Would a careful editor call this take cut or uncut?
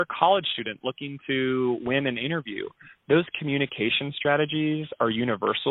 uncut